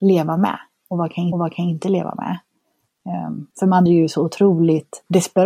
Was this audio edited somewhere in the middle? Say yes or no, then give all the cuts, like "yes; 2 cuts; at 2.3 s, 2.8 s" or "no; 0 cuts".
yes; 3 cuts; at 1.3 s, 3.5 s, 3.9 s